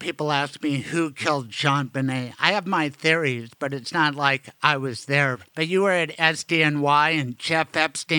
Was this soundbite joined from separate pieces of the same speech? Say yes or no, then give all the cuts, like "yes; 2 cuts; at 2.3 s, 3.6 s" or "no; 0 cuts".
yes; 1 cut; at 5.5 s